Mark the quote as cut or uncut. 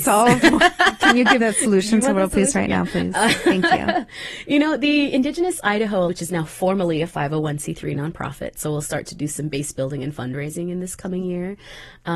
cut